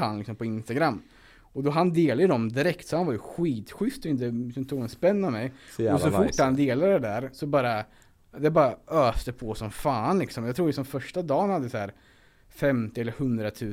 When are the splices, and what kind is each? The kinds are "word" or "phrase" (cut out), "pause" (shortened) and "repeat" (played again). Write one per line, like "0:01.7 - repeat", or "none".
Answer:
none

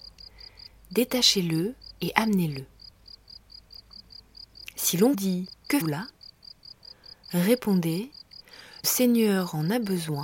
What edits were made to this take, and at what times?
0:05.1 - word
0:05.8 - word
0:08.8 - word

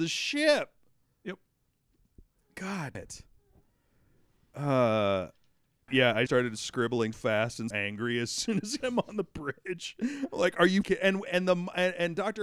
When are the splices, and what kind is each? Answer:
0:02.9 - word
0:05.9 - word
0:06.3 - word
0:07.1 - word
0:07.7 - word
0:08.8 - word
0:10.8 - word
0:11.3 - word

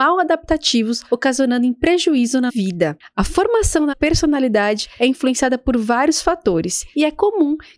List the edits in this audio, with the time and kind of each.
0:02.5 - word
0:03.9 - word

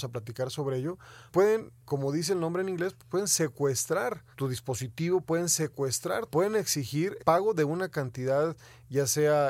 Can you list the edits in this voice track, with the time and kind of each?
0:01.3 - word
0:01.8 - word
0:04.3 - pause
0:06.3 - phrase
0:07.2 - word

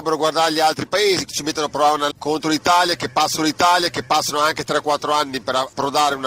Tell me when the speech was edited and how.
0:01.3 - word
0:02.1 - word
0:03.4 - repeat

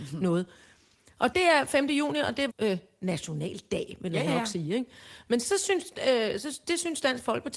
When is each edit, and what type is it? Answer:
0:01.3 - word
0:02.5 - word
0:04.3 - word

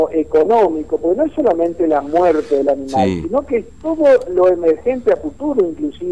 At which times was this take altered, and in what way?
none

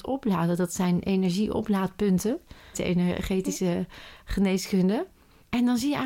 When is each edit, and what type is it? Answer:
0:02.7 - word

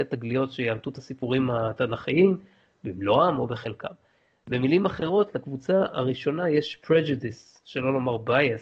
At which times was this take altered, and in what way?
none

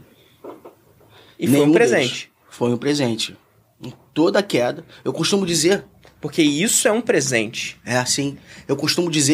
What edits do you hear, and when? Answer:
none

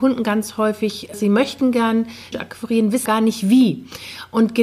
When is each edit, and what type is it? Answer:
0:01.1 - word
0:02.3 - word
0:03.1 - word

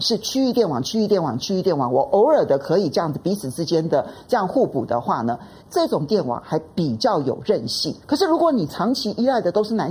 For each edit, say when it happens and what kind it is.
0:05.6 - pause
0:08.0 - pause

